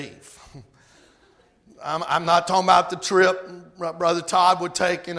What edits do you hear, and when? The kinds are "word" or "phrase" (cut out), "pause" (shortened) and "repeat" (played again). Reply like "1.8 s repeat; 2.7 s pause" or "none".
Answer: none